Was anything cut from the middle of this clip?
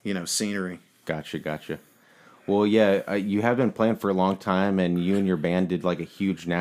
no; 0 cuts

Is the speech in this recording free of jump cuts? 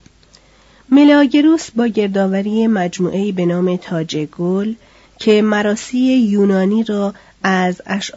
yes; 0 cuts

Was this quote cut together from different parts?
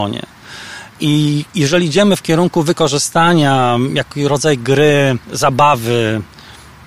yes; 2 cuts; at 1.5 s, 5.2 s

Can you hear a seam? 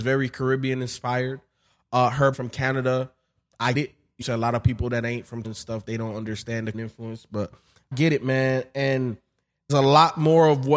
yes; 7 cuts; at 2.3 s, 3.7 s, 4.2 s, 5.4 s, 6.7 s, 7.9 s, 9.7 s

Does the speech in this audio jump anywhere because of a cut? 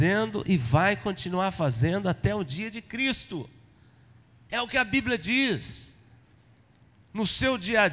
no; 0 cuts

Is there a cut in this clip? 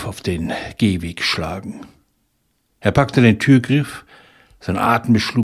no; 0 cuts

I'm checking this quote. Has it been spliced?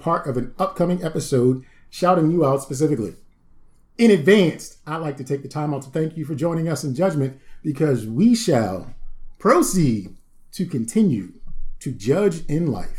no; 0 cuts

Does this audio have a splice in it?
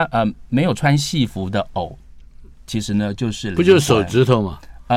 no; 0 cuts

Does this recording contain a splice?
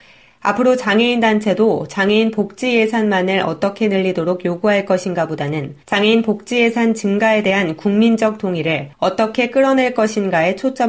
yes; 2 cuts; at 5.8 s, 8.9 s

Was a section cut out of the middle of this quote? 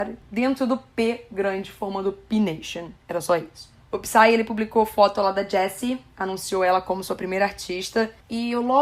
yes; 2 cuts; at 3.0 s, 3.8 s

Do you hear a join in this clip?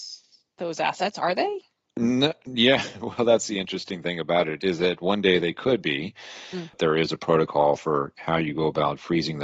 no; 0 cuts

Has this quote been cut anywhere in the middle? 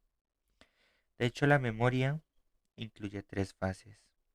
no; 0 cuts

